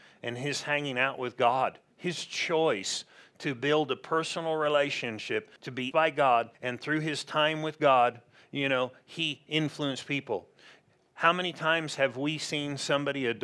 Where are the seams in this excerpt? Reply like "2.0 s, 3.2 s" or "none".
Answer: 5.6 s, 5.9 s, 6.5 s